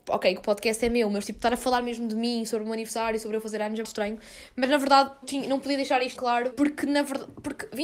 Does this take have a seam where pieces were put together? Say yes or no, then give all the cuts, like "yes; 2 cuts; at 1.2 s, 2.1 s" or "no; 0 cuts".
yes; 4 cuts; at 3.8 s, 5.2 s, 6.1 s, 6.5 s